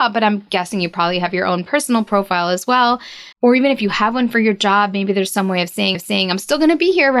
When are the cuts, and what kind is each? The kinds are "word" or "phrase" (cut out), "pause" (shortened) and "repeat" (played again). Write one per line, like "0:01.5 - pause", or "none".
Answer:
0:03.3 - pause
0:05.9 - repeat